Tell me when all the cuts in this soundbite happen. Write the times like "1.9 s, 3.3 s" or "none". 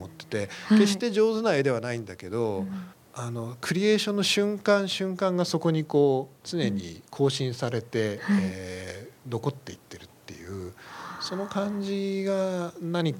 2.9 s